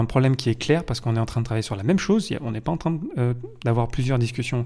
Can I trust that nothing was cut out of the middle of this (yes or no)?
yes